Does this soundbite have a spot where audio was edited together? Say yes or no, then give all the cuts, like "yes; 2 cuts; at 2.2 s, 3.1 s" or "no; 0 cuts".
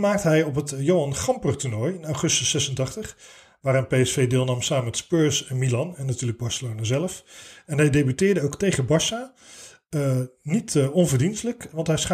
no; 0 cuts